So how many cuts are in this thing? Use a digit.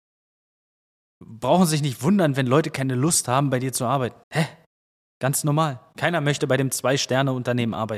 1